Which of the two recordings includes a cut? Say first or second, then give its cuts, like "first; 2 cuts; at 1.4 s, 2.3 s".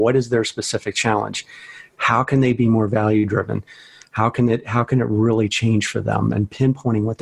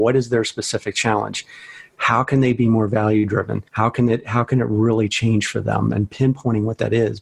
second; 1 cut; at 3.7 s